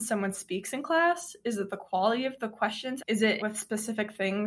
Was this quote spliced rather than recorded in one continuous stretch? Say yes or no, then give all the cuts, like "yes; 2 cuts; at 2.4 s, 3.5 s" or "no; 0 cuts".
yes; 2 cuts; at 3.0 s, 3.4 s